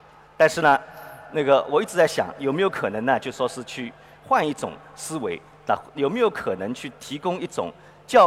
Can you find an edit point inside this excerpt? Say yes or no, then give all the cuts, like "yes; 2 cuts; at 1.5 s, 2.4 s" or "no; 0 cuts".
no; 0 cuts